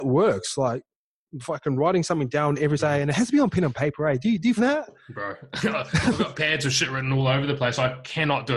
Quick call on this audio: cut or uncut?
cut